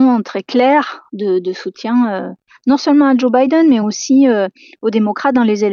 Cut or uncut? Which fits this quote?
uncut